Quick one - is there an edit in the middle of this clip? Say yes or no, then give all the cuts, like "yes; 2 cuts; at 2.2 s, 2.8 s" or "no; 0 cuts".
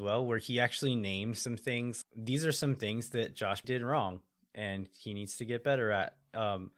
yes; 2 cuts; at 2.0 s, 3.6 s